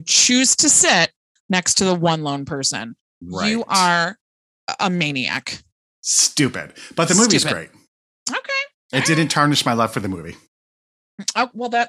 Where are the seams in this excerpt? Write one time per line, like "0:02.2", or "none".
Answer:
none